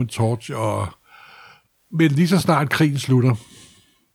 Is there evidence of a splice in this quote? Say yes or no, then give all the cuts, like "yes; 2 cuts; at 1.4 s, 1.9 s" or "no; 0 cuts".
no; 0 cuts